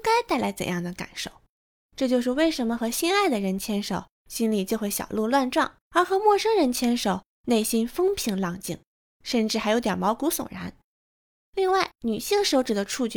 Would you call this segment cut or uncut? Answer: cut